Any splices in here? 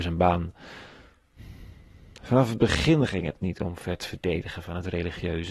no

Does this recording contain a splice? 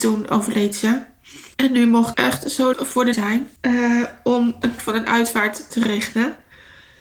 yes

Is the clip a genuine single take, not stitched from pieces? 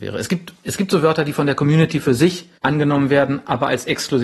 no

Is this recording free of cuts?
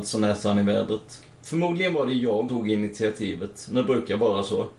no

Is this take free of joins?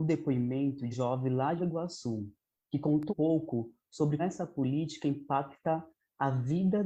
no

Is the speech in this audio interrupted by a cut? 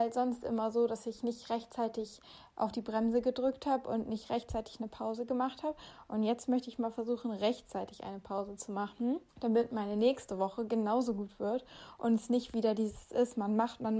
yes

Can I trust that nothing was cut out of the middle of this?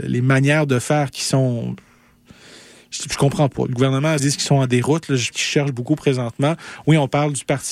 no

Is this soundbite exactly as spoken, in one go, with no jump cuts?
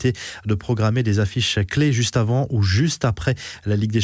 yes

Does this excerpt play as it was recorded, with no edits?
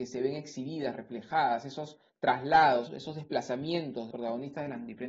no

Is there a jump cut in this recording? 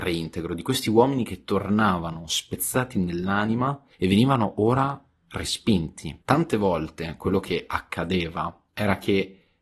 yes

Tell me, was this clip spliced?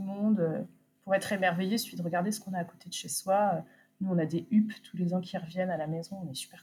no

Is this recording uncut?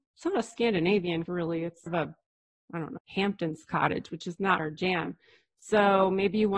no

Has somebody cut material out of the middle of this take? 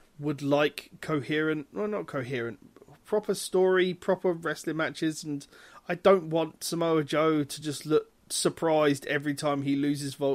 no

